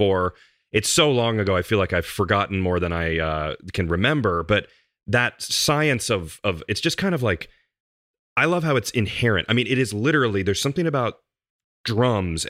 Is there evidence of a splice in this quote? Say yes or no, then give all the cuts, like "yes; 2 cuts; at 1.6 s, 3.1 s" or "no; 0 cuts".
no; 0 cuts